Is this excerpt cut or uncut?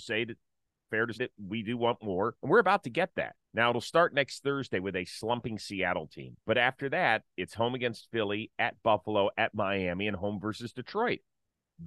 cut